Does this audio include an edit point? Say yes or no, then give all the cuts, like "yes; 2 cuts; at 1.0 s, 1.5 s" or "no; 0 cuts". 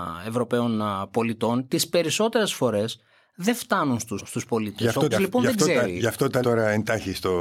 yes; 3 cuts; at 4.2 s, 5.1 s, 6.4 s